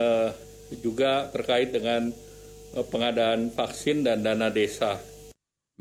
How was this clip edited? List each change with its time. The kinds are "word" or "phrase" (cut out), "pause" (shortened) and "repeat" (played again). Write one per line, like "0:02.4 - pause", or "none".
none